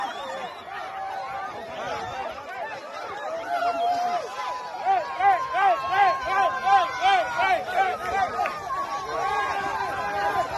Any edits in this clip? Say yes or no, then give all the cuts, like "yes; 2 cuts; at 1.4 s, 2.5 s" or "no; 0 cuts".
no; 0 cuts